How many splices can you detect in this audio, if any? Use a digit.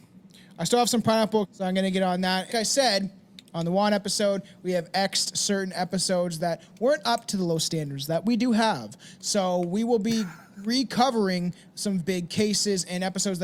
3